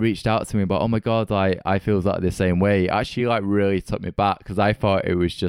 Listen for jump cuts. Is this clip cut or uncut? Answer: uncut